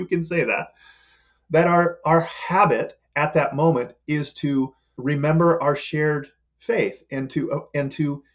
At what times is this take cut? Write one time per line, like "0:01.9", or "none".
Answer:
none